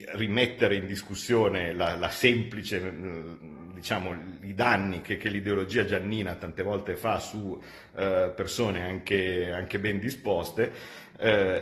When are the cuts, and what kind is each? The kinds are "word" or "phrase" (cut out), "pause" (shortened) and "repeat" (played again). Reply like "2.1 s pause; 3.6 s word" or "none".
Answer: none